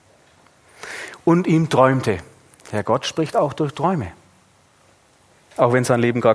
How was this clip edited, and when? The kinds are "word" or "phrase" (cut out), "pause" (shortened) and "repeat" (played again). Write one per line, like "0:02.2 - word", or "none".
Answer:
none

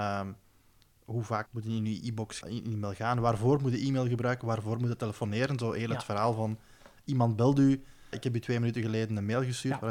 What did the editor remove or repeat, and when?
0:01.5 - word
0:02.4 - word
0:08.1 - word

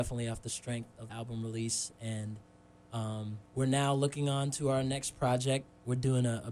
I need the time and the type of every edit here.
0:01.1 - word
0:03.5 - pause

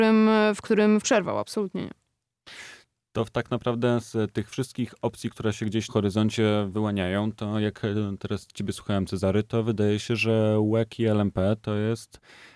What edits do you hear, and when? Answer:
0:01.0 - word
0:05.9 - word

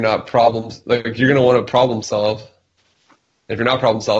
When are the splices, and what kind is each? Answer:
none

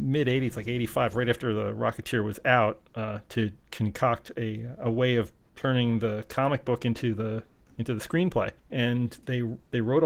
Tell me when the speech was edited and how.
0:08.6 - pause

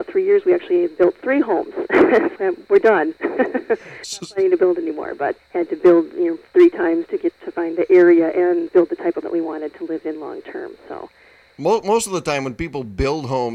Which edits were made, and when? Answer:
0:02.3 - word
0:05.4 - word
0:08.7 - word
0:09.2 - word

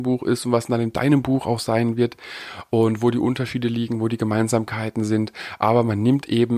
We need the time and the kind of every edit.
none

